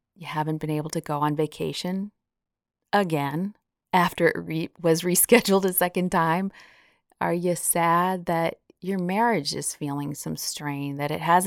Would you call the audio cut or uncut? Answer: uncut